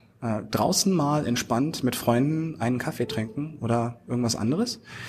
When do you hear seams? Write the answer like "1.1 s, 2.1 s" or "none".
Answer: none